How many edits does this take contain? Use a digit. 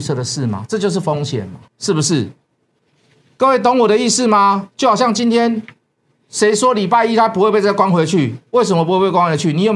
1